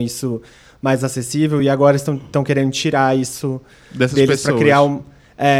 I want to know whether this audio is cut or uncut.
uncut